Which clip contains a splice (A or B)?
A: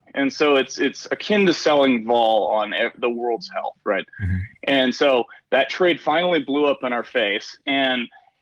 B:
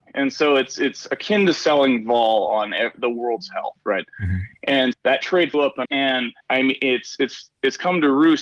B